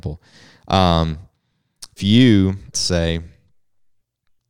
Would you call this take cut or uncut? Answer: cut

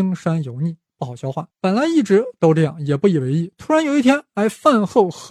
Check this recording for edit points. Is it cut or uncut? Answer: cut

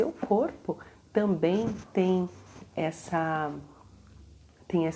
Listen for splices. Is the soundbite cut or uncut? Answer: uncut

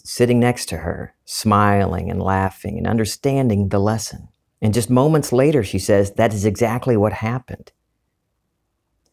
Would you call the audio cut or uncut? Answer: cut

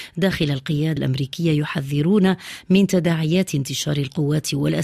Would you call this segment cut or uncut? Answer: cut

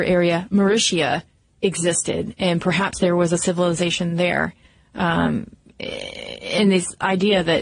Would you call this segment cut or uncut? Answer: uncut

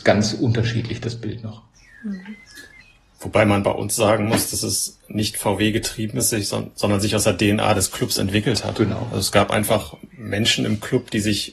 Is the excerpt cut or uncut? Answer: cut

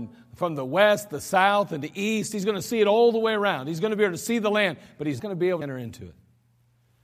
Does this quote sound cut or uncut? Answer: cut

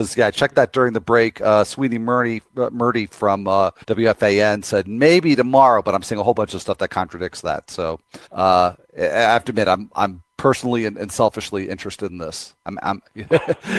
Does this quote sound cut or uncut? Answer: cut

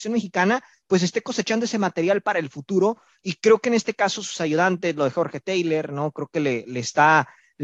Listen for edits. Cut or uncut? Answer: uncut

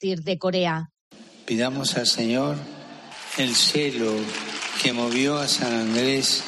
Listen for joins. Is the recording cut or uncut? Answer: uncut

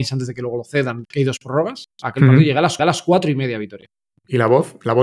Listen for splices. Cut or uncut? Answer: cut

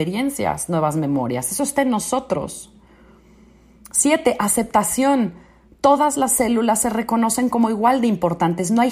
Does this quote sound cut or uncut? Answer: uncut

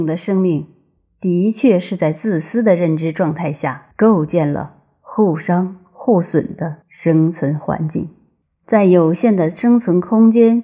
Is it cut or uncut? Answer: cut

